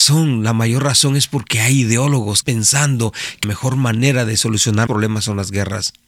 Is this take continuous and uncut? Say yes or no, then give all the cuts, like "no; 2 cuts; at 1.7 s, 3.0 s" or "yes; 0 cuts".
no; 3 cuts; at 2.4 s, 3.4 s, 4.9 s